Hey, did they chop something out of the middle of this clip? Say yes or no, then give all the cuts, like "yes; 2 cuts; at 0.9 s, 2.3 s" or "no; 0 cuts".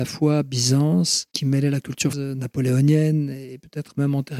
yes; 2 cuts; at 1.3 s, 2.1 s